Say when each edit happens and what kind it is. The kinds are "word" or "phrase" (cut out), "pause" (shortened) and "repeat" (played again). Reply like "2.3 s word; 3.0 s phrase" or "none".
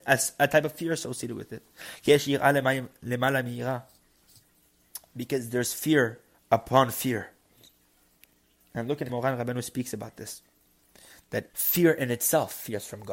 6.3 s pause; 9.1 s word; 11.5 s word